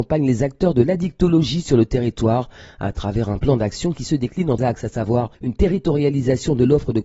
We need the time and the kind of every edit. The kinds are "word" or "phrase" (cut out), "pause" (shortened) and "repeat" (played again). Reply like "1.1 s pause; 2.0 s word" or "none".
4.6 s word; 5.3 s pause